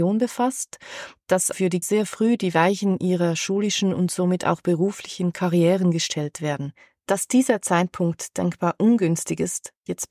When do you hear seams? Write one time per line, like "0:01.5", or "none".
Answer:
0:01.5
0:01.8